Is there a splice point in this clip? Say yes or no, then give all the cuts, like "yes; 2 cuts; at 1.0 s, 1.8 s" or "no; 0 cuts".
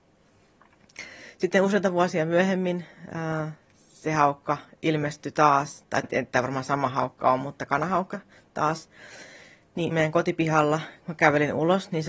yes; 2 cuts; at 6.0 s, 9.9 s